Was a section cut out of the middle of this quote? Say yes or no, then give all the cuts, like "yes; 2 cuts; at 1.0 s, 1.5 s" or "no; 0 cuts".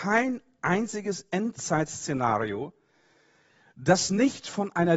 no; 0 cuts